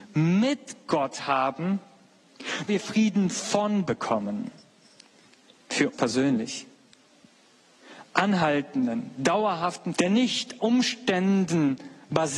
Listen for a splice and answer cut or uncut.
cut